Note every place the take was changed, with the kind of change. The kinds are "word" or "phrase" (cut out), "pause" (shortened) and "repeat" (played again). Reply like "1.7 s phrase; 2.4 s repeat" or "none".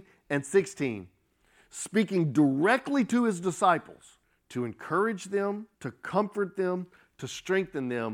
4.2 s pause; 5.7 s pause